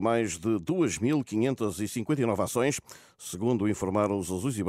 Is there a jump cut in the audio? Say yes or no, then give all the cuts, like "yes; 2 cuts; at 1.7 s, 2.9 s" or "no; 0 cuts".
no; 0 cuts